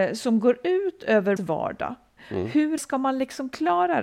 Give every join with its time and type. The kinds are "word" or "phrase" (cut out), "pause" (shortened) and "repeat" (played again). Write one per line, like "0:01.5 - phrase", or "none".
0:01.4 - word
0:02.8 - word